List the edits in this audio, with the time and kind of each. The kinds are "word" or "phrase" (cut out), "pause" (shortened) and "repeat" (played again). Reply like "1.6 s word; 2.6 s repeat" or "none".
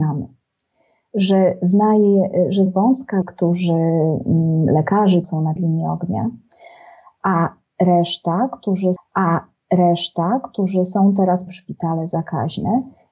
2.7 s word; 3.2 s phrase; 5.2 s phrase; 5.6 s word; 9.0 s repeat; 11.5 s word